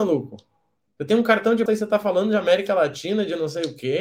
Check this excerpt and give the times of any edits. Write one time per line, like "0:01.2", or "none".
0:01.7